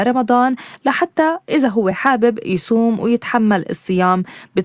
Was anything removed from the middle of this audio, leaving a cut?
no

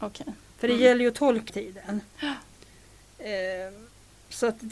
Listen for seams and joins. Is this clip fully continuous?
no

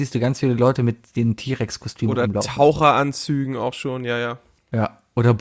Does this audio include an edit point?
no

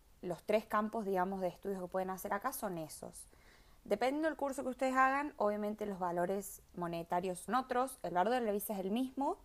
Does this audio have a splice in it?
yes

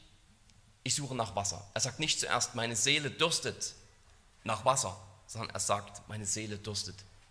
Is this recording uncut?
yes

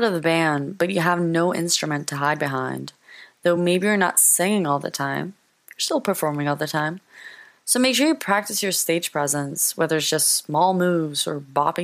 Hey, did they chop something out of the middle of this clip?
no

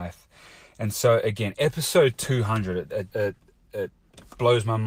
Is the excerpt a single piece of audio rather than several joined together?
no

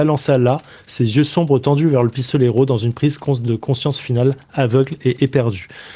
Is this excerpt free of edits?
yes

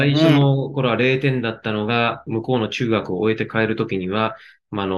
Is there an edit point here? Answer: yes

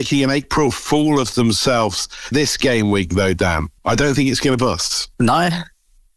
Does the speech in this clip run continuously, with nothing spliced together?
no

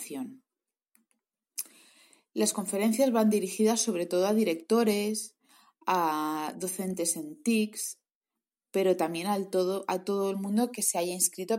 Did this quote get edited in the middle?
no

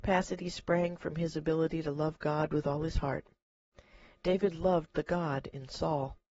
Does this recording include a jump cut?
no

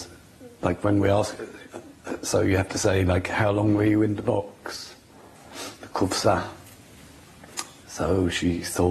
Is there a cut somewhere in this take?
no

